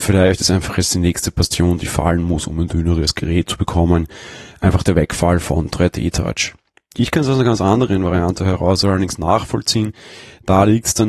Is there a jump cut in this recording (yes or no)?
no